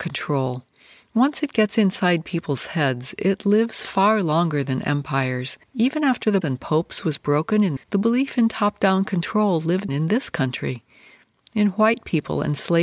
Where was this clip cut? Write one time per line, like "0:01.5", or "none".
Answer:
0:05.6
0:06.4
0:07.8
0:09.9